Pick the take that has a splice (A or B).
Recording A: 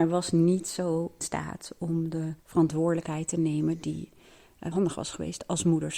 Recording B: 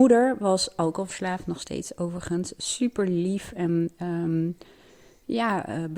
A